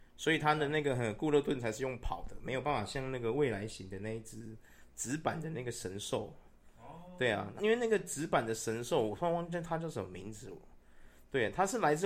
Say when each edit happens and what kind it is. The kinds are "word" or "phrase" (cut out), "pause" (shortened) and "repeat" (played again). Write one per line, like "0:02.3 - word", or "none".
0:07.6 - word

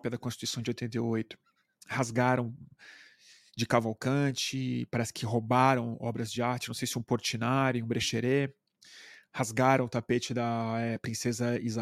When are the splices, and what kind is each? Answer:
none

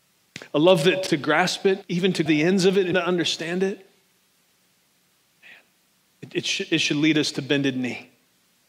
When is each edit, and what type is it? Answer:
0:01.1 - word
0:01.8 - word
0:02.3 - word
0:02.9 - word

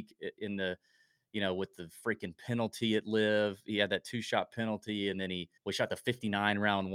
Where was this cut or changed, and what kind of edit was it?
0:05.6 - pause

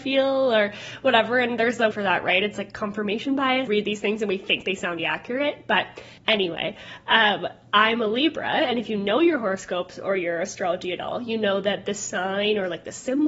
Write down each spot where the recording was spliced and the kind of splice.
0:01.9 - word
0:03.7 - phrase
0:05.0 - word
0:06.2 - pause

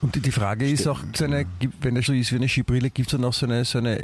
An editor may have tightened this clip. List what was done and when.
0:01.1 - word
0:02.0 - word

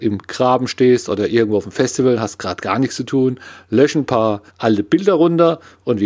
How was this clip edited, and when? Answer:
0:04.5 - pause

